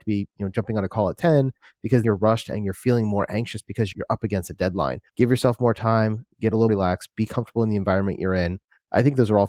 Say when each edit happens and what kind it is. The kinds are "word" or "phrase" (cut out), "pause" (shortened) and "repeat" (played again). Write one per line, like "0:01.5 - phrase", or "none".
0:02.0 - word
0:03.9 - word
0:05.1 - pause
0:06.7 - word